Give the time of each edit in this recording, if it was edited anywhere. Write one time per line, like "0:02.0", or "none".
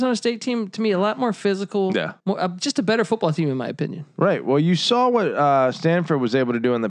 0:02.2